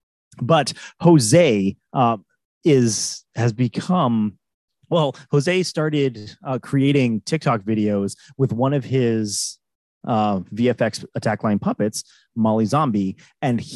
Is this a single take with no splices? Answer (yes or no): yes